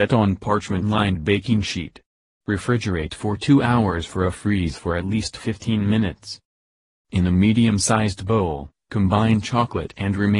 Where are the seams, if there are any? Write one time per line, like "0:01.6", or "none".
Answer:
none